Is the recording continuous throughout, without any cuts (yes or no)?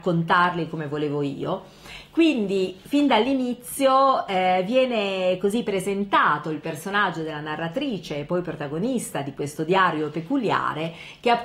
yes